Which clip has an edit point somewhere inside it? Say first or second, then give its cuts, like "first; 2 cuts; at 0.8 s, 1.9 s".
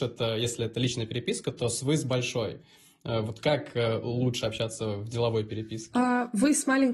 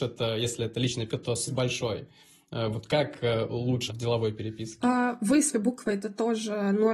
second; 4 cuts; at 1.1 s, 1.5 s, 3.9 s, 5.5 s